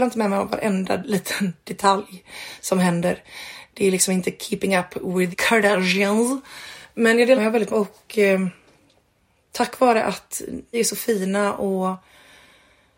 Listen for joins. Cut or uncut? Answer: cut